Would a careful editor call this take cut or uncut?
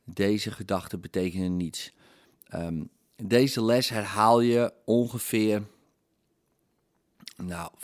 uncut